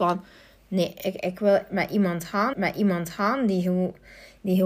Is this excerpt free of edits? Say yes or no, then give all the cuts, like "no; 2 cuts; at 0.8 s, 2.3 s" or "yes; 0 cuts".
no; 1 cut; at 2.5 s